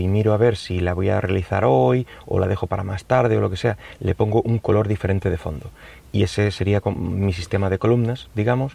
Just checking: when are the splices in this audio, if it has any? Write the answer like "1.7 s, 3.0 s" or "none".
none